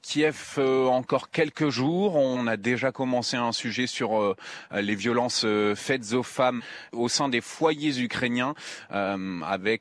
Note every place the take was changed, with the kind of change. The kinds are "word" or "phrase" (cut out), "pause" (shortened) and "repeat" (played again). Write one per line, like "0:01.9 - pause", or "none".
none